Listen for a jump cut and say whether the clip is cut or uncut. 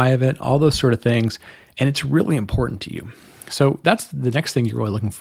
uncut